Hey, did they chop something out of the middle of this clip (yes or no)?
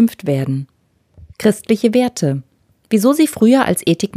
yes